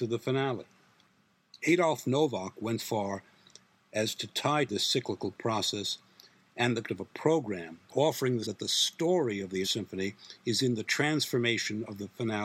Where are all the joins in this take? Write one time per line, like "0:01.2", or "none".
0:02.8
0:04.7
0:06.8
0:07.9
0:08.4
0:09.6